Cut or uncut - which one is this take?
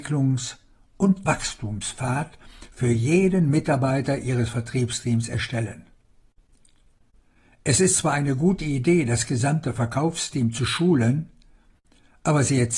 uncut